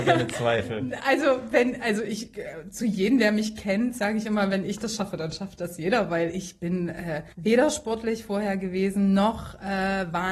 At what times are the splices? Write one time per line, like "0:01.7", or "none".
0:07.3